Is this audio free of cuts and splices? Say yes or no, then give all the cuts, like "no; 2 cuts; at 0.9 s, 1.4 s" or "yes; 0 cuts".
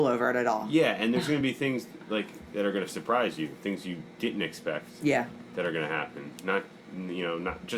yes; 0 cuts